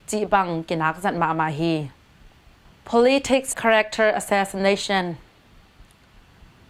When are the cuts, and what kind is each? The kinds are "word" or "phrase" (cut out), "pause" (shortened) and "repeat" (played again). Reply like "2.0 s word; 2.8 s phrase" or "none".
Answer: 3.5 s phrase